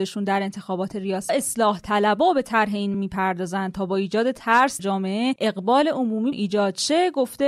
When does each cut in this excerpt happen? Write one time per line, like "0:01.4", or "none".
0:01.3
0:02.9
0:04.8
0:06.3